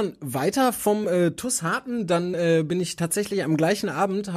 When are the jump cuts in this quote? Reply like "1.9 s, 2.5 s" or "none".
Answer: none